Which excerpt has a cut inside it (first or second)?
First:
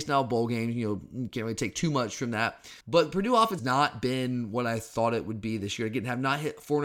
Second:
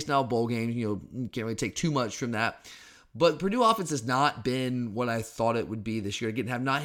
first